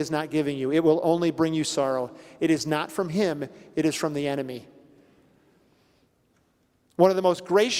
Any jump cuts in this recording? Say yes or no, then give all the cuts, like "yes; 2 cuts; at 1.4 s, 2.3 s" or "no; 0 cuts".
no; 0 cuts